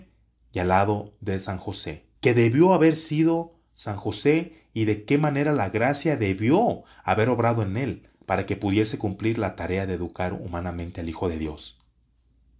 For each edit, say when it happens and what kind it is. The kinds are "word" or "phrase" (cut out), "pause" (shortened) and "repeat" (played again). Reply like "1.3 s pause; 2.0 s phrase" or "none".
2.2 s pause